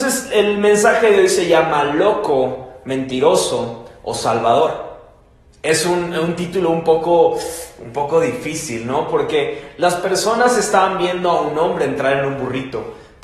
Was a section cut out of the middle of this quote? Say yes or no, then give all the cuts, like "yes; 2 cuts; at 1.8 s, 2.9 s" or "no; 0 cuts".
no; 0 cuts